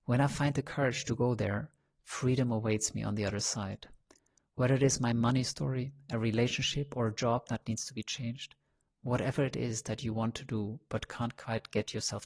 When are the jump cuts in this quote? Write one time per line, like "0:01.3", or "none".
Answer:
none